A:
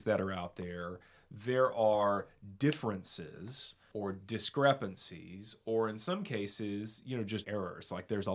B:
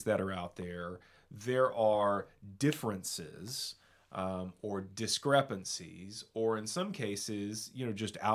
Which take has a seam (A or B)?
A